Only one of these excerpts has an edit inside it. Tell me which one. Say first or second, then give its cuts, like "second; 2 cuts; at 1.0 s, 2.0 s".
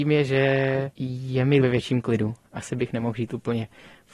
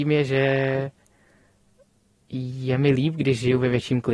first; 2 cuts; at 0.9 s, 1.6 s